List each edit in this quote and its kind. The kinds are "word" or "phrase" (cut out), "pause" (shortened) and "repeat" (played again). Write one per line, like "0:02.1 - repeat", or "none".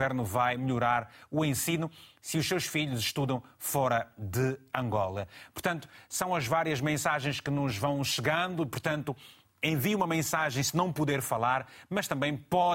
none